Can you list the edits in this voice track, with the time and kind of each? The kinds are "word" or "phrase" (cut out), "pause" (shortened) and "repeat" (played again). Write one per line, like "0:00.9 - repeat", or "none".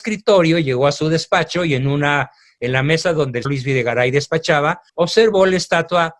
0:03.4 - word
0:04.9 - pause